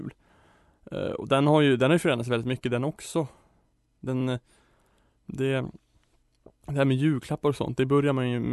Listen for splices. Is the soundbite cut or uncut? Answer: uncut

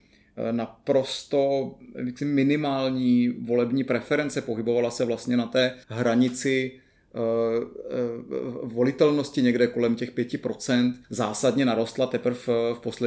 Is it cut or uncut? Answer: cut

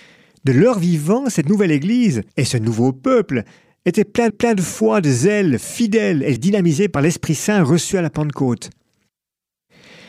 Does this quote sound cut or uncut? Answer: cut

